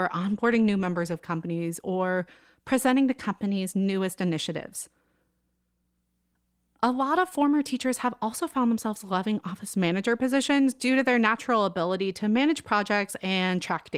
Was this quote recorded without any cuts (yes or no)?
yes